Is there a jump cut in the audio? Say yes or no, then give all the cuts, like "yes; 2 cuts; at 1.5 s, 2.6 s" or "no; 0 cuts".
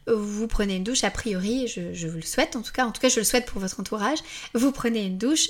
no; 0 cuts